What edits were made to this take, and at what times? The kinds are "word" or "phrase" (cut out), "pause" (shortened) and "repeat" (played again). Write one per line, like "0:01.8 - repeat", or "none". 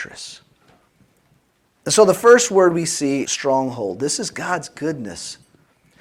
0:03.2 - word